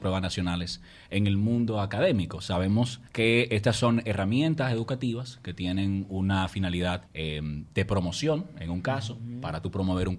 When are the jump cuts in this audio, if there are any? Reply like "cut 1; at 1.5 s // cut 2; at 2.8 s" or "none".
cut 1; at 3.1 s // cut 2; at 7.1 s